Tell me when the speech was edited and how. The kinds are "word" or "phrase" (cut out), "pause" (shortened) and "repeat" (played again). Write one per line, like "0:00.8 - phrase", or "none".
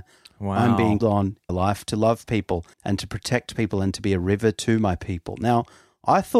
0:01.0 - word
0:01.5 - phrase
0:02.7 - pause